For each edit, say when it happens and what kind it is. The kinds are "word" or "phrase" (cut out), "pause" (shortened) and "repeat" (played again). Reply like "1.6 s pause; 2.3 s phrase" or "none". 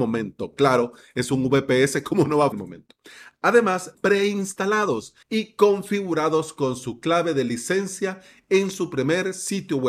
2.5 s phrase; 3.9 s phrase; 5.2 s pause